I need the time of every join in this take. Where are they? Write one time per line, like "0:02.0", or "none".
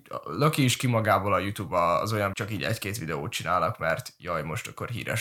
0:02.3